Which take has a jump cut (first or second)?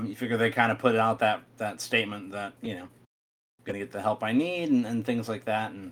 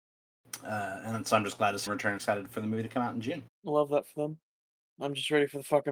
second